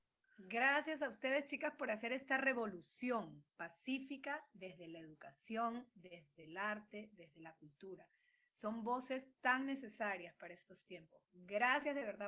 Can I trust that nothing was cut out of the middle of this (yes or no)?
yes